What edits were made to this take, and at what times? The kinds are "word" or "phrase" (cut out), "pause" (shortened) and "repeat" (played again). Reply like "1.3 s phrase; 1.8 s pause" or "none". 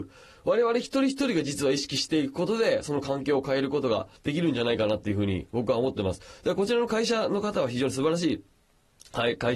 4.2 s pause